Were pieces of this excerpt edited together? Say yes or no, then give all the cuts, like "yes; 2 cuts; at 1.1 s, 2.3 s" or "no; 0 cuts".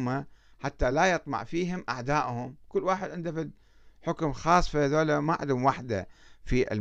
no; 0 cuts